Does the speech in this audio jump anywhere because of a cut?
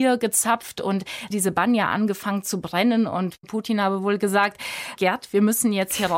yes; 2 cuts; at 1.3 s, 5.0 s

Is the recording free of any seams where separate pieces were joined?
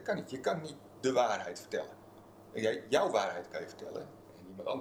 yes; 0 cuts

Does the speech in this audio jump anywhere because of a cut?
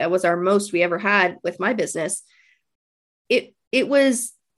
no; 0 cuts

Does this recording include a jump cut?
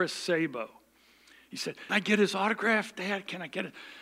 yes; 1 cut; at 1.9 s

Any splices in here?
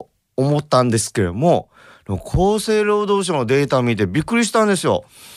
no; 0 cuts

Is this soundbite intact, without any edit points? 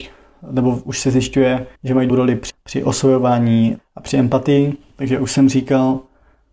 no; 4 cuts; at 1.7 s, 2.1 s, 2.5 s, 3.8 s

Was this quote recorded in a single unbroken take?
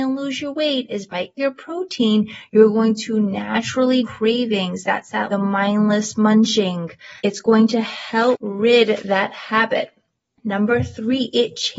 no; 4 cuts; at 1.4 s, 4.0 s, 5.3 s, 7.2 s

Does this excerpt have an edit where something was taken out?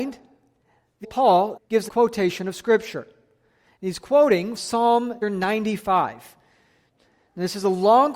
yes; 5 cuts; at 1.0 s, 1.6 s, 1.9 s, 4.6 s, 5.2 s

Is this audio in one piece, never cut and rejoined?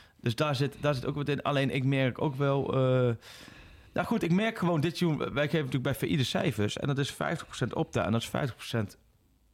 yes; 0 cuts

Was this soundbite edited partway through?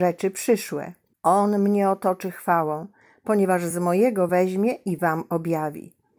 no; 0 cuts

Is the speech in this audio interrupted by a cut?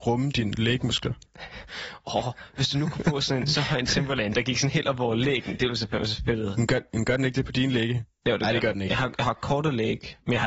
yes; 1 cut; at 1.3 s

